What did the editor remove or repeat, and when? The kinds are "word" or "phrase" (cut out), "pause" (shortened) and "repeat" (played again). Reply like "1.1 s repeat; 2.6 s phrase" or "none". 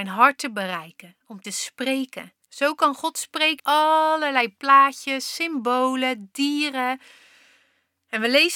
1.4 s phrase; 2.4 s pause; 3.6 s word